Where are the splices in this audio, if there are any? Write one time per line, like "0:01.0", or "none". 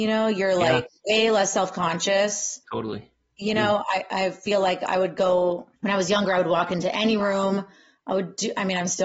0:02.6
0:05.8